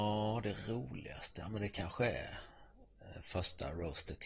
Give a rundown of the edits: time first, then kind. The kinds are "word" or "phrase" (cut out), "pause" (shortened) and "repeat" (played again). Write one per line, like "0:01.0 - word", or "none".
none